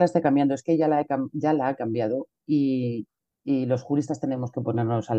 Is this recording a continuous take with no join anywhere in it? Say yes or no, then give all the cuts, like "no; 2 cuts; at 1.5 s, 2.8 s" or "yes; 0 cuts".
yes; 0 cuts